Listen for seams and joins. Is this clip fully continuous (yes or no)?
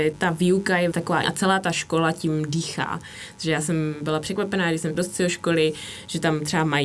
no